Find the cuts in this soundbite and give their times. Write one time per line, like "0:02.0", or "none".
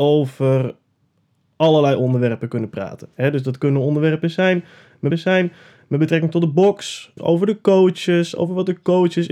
0:03.1
0:05.1
0:07.2